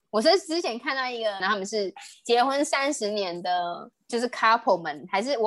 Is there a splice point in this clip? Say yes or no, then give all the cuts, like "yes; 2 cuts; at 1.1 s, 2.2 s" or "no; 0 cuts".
yes; 2 cuts; at 1.4 s, 3.9 s